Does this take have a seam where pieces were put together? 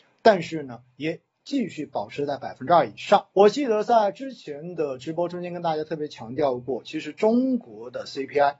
yes; 1 cut; at 3.3 s

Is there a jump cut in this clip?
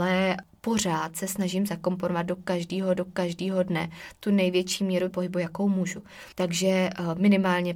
yes; 3 cuts; at 3.0 s, 5.1 s, 6.3 s

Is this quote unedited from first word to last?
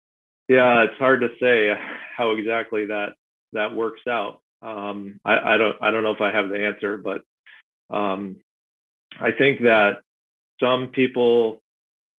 yes; 0 cuts

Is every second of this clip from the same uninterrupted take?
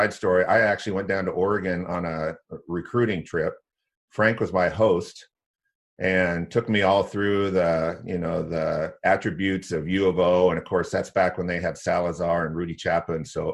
yes; 0 cuts

